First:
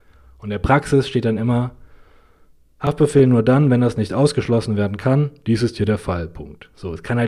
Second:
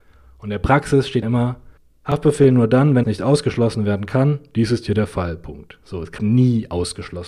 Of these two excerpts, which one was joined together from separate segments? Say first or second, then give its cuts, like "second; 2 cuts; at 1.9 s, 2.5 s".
second; 4 cuts; at 1.2 s, 1.8 s, 3.0 s, 6.2 s